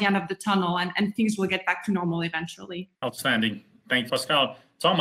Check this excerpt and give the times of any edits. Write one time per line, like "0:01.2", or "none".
0:02.9
0:04.1